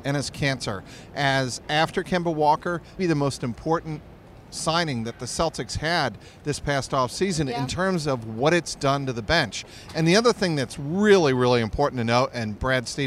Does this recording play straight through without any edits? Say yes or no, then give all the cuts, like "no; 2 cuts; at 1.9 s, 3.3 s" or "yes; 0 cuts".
no; 1 cut; at 3.0 s